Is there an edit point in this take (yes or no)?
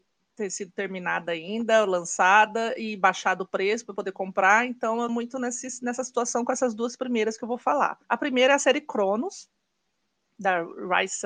yes